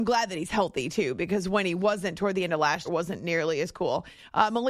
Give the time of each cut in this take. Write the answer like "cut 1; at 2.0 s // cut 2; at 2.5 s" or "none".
cut 1; at 2.8 s